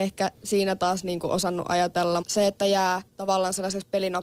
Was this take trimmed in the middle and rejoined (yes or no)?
yes